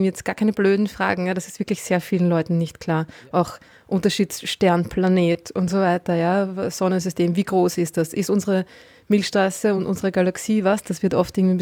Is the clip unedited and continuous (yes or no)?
yes